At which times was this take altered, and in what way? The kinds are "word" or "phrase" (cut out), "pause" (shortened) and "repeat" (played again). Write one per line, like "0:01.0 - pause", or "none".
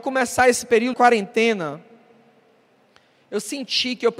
0:00.9 - word